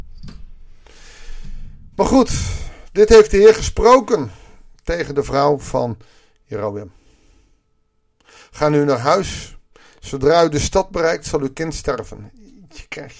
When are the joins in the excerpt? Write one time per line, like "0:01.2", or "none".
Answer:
none